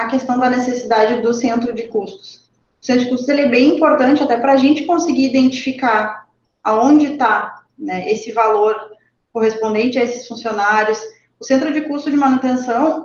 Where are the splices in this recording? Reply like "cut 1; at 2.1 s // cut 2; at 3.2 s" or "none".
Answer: none